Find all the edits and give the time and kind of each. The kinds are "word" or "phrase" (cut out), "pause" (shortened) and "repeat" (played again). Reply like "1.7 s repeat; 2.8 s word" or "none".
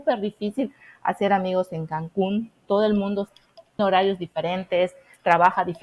3.8 s word